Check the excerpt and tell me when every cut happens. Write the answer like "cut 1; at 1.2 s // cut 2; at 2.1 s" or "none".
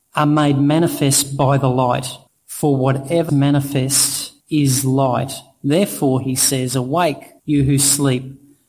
cut 1; at 2.3 s // cut 2; at 3.3 s // cut 3; at 4.4 s // cut 4; at 7.4 s